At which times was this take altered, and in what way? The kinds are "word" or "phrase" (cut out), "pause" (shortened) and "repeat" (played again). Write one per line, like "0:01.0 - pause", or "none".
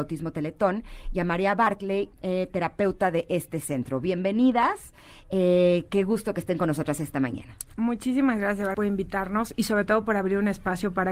0:08.7 - word

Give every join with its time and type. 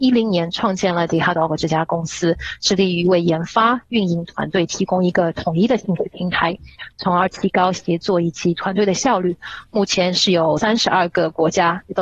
none

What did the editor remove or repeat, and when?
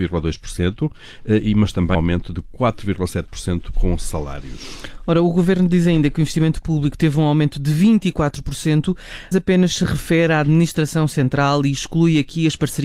0:01.9 - word
0:09.3 - word

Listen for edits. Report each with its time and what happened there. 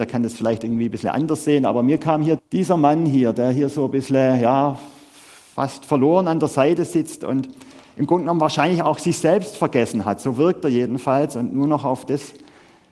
0:02.4 - word

